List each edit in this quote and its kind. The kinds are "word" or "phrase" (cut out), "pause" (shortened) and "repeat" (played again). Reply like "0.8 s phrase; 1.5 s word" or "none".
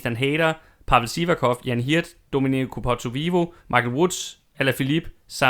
3.6 s pause